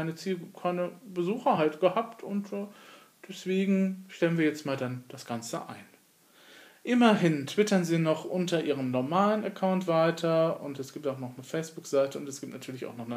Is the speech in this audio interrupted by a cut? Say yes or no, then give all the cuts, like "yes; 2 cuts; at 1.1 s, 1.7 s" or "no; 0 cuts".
no; 0 cuts